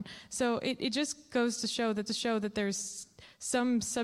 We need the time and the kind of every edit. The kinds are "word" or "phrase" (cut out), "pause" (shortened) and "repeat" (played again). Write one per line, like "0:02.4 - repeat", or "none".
0:02.1 - repeat